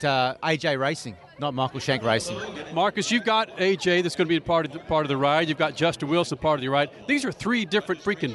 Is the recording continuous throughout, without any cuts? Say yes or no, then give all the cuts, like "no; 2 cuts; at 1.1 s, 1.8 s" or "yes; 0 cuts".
yes; 0 cuts